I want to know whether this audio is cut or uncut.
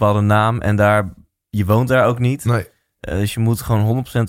uncut